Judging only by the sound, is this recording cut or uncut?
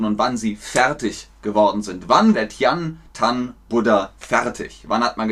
cut